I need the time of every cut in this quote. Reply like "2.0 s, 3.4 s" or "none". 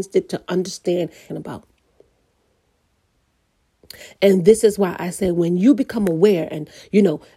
1.3 s

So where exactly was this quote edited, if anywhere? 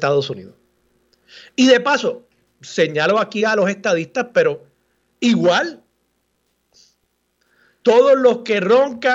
none

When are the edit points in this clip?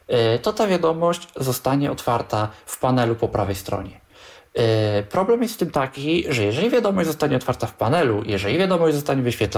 none

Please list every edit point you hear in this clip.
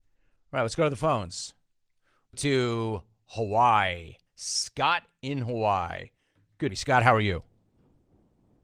2.3 s, 4.3 s, 6.7 s

